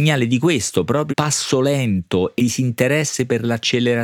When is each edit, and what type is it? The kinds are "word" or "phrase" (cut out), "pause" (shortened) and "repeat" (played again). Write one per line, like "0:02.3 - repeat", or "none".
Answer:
0:01.1 - word
0:02.4 - word